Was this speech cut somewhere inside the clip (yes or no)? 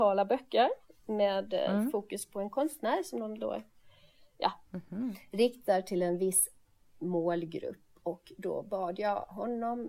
no